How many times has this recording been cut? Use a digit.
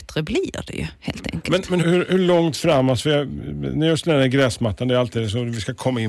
1